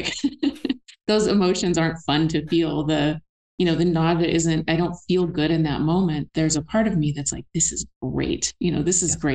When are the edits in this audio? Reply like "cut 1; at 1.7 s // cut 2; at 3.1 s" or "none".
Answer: cut 1; at 6.3 s